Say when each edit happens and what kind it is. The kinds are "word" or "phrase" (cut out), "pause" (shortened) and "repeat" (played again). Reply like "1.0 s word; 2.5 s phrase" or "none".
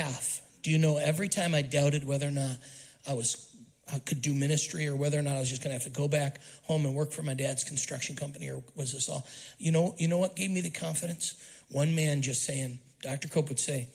3.8 s pause

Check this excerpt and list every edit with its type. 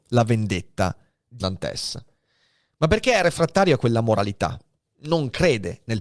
1.4 s word

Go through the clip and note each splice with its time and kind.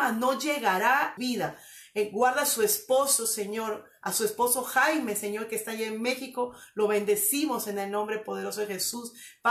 1.2 s phrase

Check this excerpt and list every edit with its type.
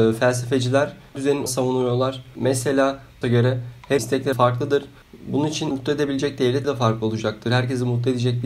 1.1 s word; 1.5 s word; 3.2 s word; 4.0 s word; 4.3 s word; 5.7 s word; 6.6 s word

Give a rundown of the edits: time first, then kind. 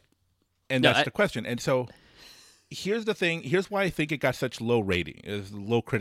none

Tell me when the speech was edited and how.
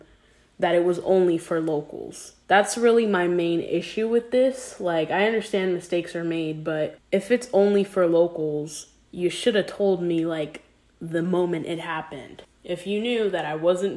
2.4 s pause

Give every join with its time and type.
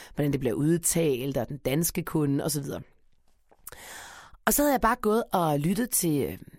none

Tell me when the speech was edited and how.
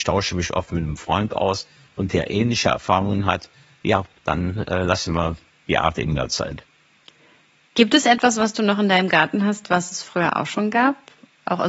none

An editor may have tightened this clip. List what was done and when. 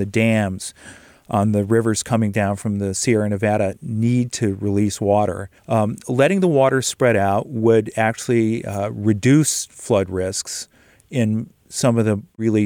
5.6 s pause

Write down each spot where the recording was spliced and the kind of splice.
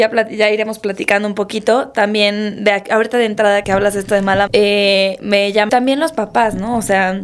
3.6 s word; 4.5 s word; 5.7 s phrase

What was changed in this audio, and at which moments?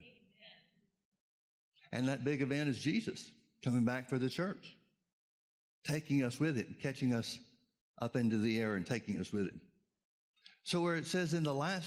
none

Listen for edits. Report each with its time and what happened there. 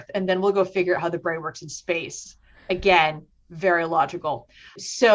none

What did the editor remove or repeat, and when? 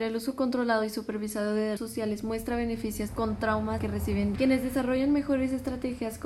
1.8 s word; 3.1 s phrase; 3.8 s word; 4.4 s word

